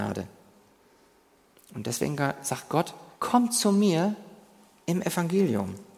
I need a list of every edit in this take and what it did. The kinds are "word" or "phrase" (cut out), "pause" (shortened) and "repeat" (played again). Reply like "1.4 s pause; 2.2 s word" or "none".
3.1 s pause